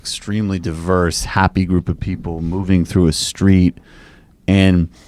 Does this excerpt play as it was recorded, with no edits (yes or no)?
yes